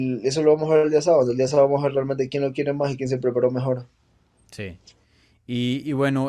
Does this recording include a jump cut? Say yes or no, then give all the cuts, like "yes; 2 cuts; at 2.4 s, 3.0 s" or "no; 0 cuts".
no; 0 cuts